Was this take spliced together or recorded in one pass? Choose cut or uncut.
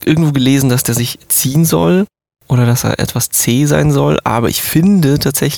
uncut